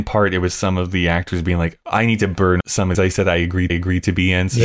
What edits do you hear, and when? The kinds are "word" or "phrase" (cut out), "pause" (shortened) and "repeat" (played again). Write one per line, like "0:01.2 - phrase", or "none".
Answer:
0:02.6 - word
0:02.9 - phrase
0:03.7 - repeat